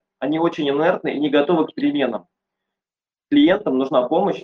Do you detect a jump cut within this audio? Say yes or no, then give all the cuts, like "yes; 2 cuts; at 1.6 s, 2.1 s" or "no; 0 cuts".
no; 0 cuts